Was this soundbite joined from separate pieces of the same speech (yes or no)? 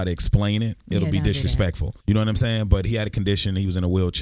yes